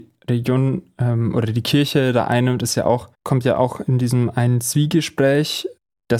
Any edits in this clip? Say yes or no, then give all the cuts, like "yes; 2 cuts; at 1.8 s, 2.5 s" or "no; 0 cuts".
yes; 1 cut; at 3.1 s